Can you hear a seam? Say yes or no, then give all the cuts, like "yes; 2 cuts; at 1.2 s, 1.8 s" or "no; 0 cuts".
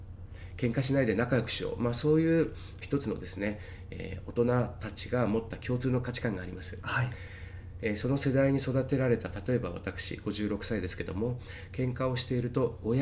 yes; 1 cut; at 2.8 s